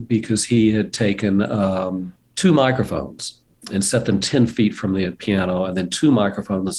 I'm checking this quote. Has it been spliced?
no; 0 cuts

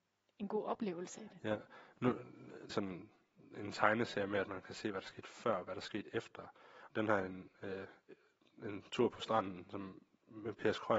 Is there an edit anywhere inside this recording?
yes; 2 cuts; at 2.7 s, 6.9 s

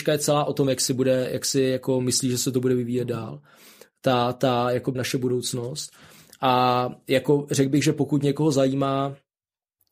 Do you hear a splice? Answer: yes; 1 cut; at 4.9 s

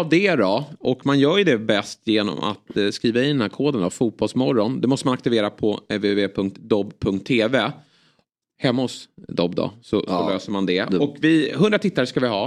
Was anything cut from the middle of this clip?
no; 0 cuts

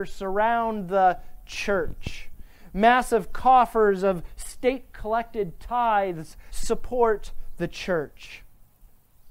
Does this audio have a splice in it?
yes; 1 cut; at 6.5 s

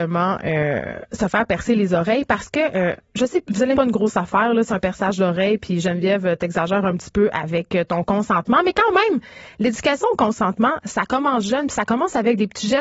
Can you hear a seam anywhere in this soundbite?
yes; 3 cuts; at 3.4 s, 3.7 s, 4.7 s

